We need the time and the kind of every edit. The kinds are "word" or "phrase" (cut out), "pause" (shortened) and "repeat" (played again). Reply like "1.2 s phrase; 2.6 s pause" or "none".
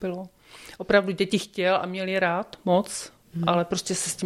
none